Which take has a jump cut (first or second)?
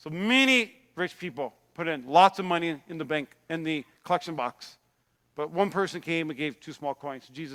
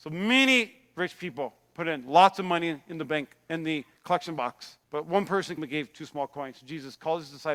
second